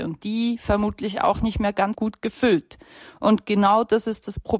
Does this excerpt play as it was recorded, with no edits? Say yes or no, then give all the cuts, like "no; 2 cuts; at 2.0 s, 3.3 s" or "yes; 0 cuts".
no; 1 cut; at 1.9 s